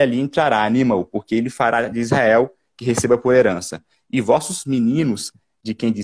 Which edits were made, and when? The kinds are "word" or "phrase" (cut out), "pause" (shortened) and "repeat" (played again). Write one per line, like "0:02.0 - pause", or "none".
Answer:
none

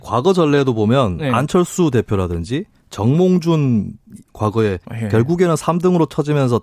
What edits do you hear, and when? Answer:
0:04.8 - word

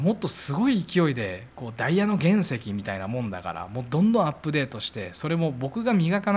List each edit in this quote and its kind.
0:01.5 - pause

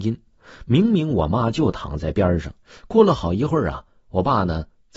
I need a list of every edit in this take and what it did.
0:02.6 - pause

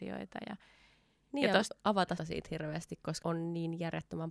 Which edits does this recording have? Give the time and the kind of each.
0:02.2 - word
0:03.2 - word

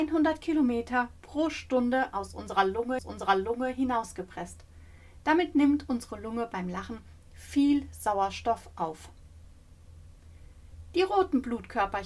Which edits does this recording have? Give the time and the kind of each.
0:03.0 - repeat

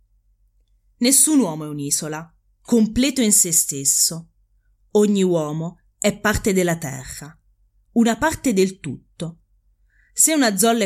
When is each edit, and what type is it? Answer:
none

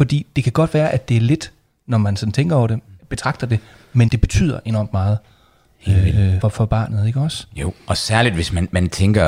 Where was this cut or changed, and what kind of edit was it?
0:03.0 - word
0:04.1 - word
0:06.4 - word

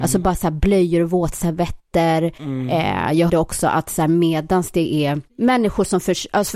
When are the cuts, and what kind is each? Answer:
0:03.3 - word
0:05.3 - pause

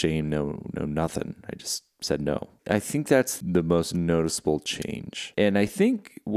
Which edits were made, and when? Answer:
none

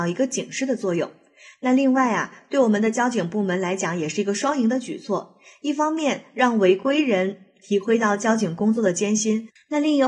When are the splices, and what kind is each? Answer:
none

